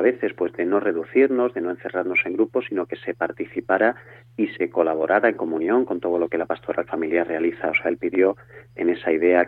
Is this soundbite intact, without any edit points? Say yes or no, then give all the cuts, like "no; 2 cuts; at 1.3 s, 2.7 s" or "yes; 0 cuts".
yes; 0 cuts